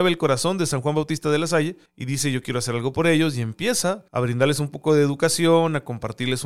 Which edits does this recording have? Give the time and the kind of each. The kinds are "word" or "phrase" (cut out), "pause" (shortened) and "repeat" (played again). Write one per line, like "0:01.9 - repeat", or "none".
0:01.9 - pause
0:04.1 - pause